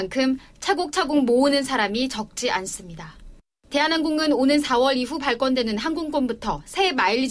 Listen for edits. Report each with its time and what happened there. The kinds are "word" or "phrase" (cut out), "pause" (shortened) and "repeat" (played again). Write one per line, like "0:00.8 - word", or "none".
none

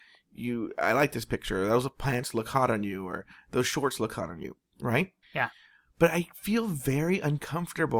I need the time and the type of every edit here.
0:05.2 - pause

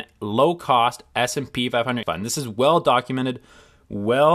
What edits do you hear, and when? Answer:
0:02.0 - word

